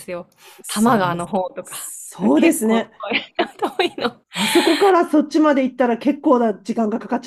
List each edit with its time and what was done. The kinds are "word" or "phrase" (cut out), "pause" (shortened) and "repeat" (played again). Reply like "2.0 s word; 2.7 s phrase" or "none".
4.2 s pause